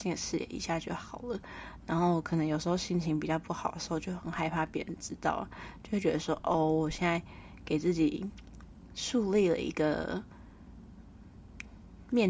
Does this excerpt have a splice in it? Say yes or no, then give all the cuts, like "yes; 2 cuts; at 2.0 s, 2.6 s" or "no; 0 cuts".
no; 0 cuts